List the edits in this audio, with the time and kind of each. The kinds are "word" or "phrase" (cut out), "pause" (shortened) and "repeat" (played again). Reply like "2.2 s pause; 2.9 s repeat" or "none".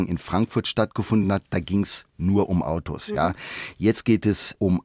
none